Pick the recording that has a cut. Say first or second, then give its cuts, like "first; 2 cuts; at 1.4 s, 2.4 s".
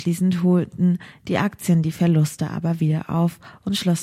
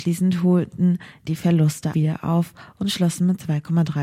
second; 2 cuts; at 1.3 s, 1.9 s